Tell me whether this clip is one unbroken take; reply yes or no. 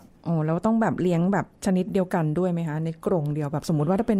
no